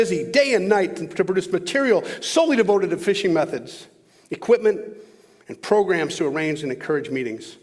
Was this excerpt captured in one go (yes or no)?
yes